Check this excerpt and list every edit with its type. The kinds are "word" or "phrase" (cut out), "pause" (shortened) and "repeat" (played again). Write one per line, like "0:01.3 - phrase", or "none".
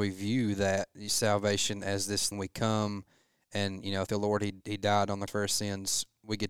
0:02.3 - word
0:04.1 - word
0:04.6 - word
0:05.3 - word